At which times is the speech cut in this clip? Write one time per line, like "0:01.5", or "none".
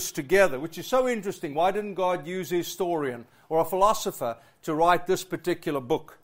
none